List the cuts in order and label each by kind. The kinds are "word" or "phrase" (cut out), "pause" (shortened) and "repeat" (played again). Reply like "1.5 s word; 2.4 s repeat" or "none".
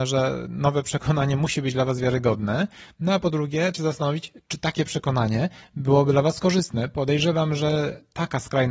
3.7 s word